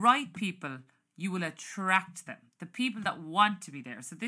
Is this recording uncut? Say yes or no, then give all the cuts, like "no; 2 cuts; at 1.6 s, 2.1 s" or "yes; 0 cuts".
yes; 0 cuts